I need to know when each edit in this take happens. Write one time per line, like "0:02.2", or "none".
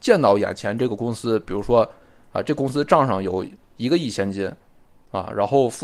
none